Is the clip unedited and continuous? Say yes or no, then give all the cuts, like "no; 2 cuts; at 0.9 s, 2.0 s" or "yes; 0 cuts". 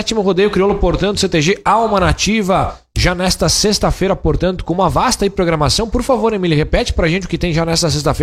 yes; 0 cuts